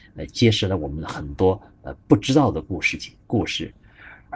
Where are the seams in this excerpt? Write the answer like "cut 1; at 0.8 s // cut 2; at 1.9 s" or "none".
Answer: cut 1; at 2.0 s // cut 2; at 3.2 s

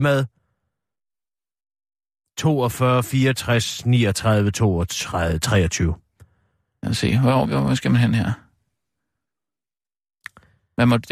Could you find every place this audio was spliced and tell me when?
cut 1; at 7.4 s

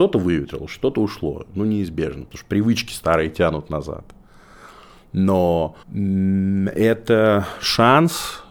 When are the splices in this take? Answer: cut 1; at 5.8 s

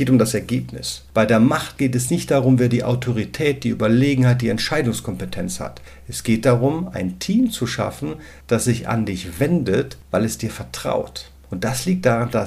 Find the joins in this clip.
none

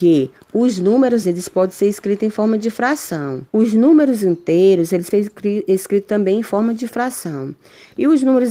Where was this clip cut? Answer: cut 1; at 1.2 s // cut 2; at 3.5 s // cut 3; at 5.1 s

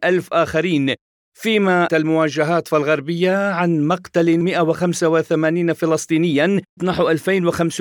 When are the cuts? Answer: cut 1; at 1.9 s // cut 2; at 2.7 s // cut 3; at 4.4 s // cut 4; at 6.8 s

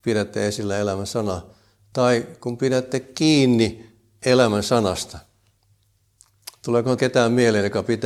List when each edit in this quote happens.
cut 1; at 7.0 s

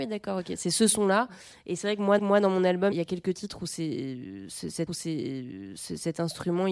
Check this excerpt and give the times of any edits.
cut 1; at 2.2 s // cut 2; at 2.9 s // cut 3; at 4.9 s

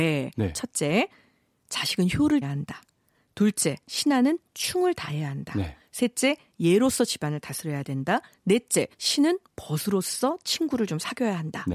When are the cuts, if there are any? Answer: cut 1; at 2.4 s // cut 2; at 3.8 s // cut 3; at 8.9 s

